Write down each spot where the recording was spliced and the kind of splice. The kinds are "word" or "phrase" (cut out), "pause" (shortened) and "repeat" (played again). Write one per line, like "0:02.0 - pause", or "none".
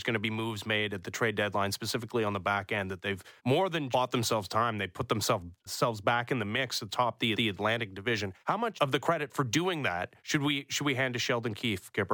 0:03.4 - pause
0:03.9 - word
0:05.7 - word
0:07.3 - repeat
0:08.4 - pause
0:08.8 - word
0:10.2 - pause

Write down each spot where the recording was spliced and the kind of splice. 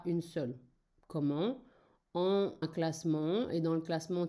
0:02.6 - word

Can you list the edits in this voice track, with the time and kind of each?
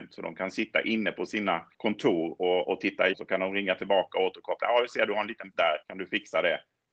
0:01.7 - pause
0:03.1 - word
0:05.5 - word
0:05.8 - pause

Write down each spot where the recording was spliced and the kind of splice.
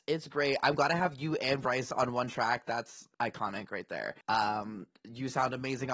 0:03.1 - pause
0:04.2 - pause

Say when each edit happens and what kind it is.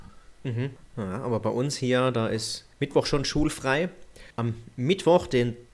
0:02.7 - pause
0:04.3 - pause

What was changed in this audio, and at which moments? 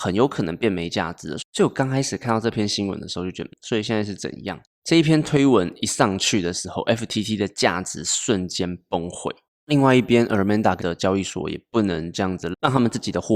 0:03.5 - word
0:10.8 - word

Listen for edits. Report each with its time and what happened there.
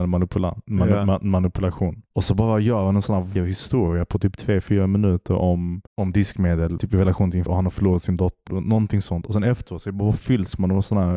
0:02.1 - pause
0:03.4 - word
0:05.9 - pause
0:06.8 - word
0:07.5 - word
0:08.5 - word

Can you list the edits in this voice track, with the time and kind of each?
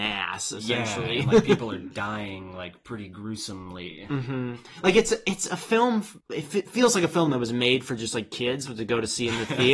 0:06.2 - pause

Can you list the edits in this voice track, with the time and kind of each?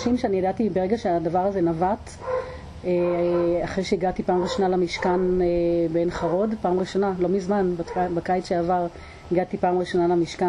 none

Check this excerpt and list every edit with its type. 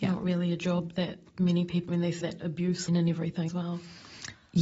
0:01.9 - word
0:02.2 - word
0:02.9 - word
0:03.5 - word

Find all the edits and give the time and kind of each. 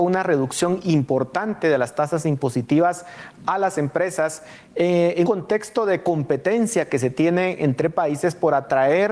0:05.2 - word

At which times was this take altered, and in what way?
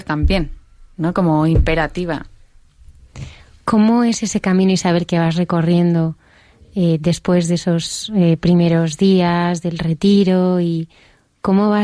none

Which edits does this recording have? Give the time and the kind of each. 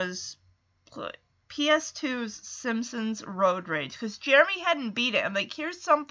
none

